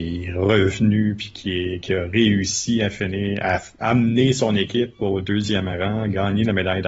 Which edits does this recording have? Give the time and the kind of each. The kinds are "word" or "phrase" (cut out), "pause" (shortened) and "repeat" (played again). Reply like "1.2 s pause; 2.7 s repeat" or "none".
none